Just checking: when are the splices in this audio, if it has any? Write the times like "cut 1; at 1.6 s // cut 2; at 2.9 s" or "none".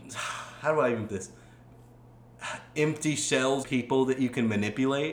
cut 1; at 1.1 s // cut 2; at 3.6 s